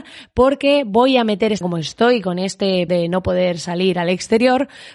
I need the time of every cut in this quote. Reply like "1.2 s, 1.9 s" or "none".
1.6 s, 2.9 s